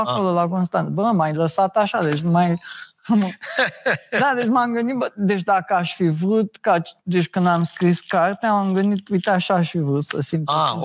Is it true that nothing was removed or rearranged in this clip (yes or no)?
no